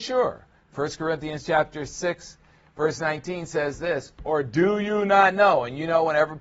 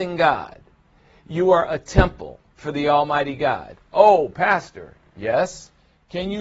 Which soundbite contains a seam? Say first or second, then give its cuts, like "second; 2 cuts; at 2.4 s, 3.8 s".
second; 1 cut; at 2.5 s